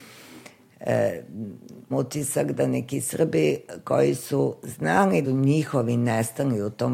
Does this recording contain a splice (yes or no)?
yes